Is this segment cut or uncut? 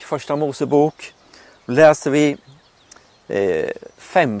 uncut